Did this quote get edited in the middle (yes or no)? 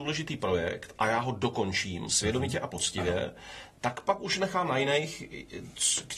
no